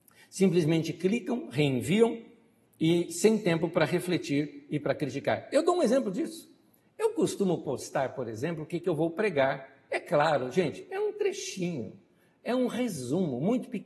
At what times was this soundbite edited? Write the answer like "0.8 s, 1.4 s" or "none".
none